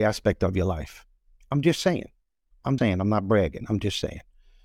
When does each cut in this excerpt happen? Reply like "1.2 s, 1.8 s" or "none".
2.8 s